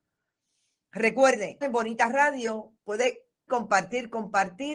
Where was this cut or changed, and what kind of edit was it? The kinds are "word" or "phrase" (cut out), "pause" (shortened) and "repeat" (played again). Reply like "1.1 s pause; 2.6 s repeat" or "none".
1.6 s word; 3.5 s word